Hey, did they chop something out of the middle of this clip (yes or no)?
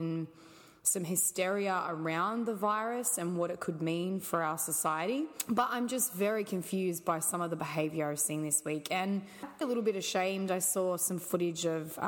yes